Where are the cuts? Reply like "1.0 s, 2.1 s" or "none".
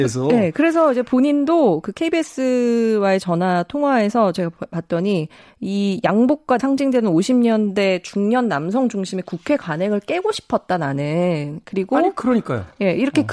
6.6 s